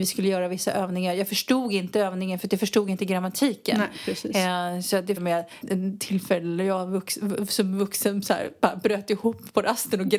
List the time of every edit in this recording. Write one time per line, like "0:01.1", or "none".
0:05.2
0:05.6